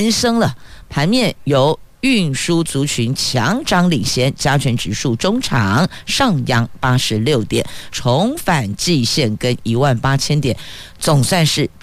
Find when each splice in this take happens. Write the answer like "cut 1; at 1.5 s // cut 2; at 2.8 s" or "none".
cut 1; at 7.9 s